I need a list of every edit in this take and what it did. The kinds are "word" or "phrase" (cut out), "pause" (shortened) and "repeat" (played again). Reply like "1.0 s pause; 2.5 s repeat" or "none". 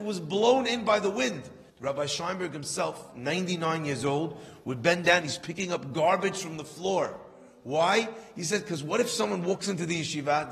1.7 s pause